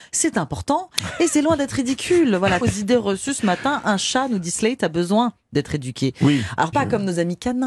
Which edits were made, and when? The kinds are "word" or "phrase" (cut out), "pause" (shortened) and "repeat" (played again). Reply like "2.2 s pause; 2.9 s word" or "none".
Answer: 2.6 s phrase; 6.7 s phrase